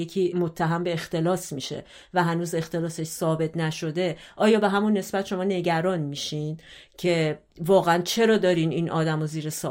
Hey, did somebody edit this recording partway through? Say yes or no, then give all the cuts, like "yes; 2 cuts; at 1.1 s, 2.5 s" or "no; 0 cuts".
no; 0 cuts